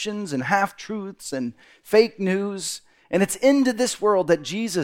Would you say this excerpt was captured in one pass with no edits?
yes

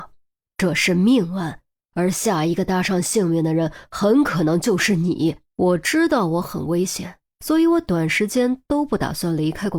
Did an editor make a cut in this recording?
yes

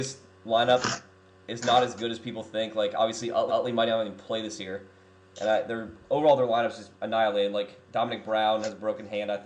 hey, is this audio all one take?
no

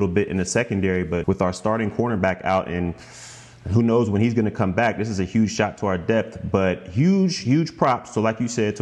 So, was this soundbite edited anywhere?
yes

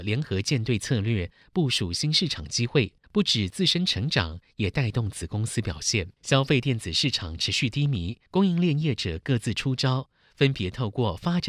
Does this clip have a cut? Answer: yes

